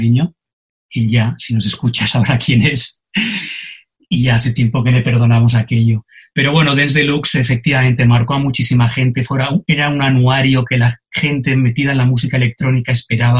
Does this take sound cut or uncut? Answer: uncut